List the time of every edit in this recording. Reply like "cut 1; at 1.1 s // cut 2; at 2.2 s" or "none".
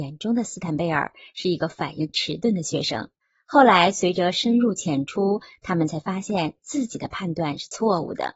cut 1; at 3.2 s